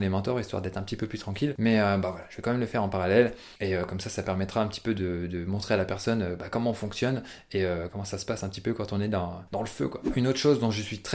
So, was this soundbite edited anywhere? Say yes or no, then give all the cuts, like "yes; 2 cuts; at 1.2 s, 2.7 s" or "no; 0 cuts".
yes; 2 cuts; at 3.6 s, 9.5 s